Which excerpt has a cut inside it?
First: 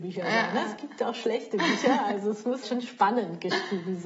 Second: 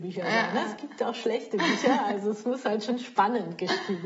first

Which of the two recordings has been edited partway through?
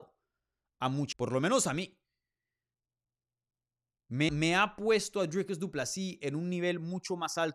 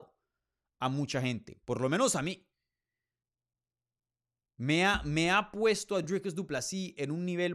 first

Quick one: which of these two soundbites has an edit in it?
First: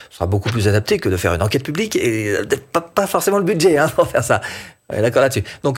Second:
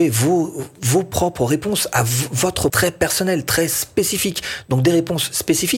second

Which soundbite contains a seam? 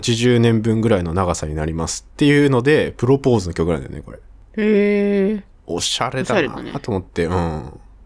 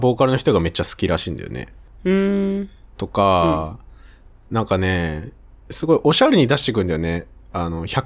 first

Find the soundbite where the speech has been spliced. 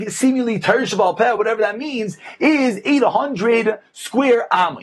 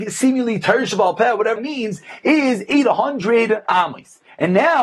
second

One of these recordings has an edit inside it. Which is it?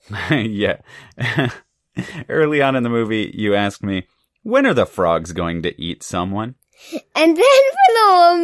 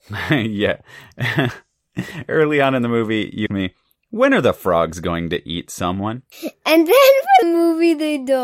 second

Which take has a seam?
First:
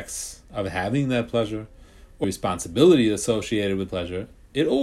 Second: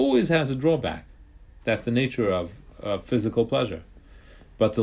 first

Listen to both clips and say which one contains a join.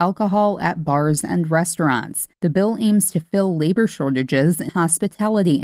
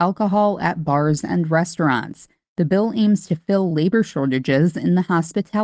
first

